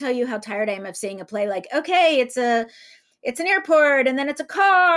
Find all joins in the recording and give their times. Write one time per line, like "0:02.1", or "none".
none